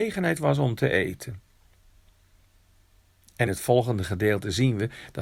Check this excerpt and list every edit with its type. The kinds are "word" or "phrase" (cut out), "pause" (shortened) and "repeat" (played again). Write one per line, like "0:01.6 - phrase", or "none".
0:03.5 - word